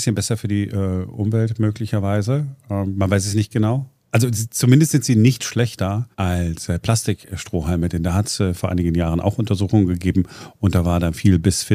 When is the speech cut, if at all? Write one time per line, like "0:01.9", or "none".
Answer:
0:06.1